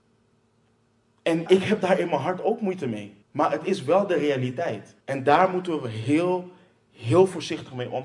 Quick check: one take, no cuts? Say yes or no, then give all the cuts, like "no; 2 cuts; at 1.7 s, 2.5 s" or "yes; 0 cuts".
no; 3 cuts; at 1.5 s, 3.2 s, 5.0 s